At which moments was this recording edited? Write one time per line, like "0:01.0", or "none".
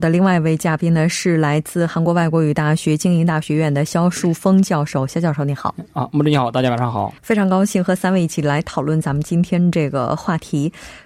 0:07.2